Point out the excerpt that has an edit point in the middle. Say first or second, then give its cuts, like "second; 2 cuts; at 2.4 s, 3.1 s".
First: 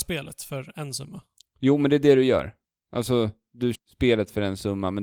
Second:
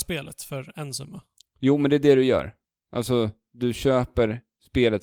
first; 1 cut; at 3.7 s